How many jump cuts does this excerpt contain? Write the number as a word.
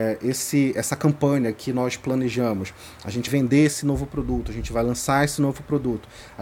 one